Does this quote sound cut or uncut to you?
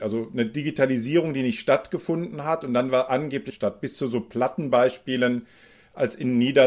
cut